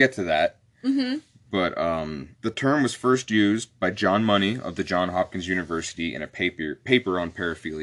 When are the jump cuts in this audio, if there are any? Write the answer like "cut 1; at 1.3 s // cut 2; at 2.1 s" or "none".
cut 1; at 2.3 s